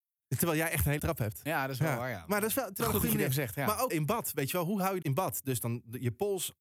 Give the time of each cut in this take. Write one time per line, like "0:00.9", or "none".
0:01.0
0:02.8
0:03.9
0:05.0